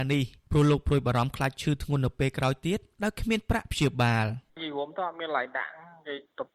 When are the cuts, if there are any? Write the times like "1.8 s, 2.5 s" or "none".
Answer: 4.5 s